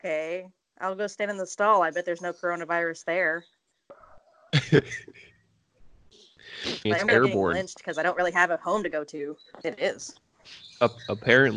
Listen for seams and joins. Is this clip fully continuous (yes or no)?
no